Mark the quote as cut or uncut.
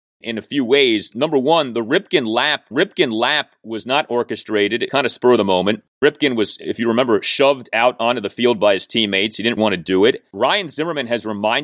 cut